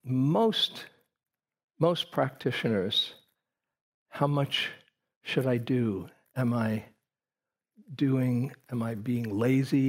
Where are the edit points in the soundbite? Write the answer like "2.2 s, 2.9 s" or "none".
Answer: none